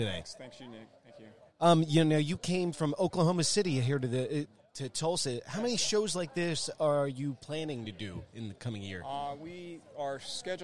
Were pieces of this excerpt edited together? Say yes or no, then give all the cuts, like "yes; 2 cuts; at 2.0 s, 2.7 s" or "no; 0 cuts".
no; 0 cuts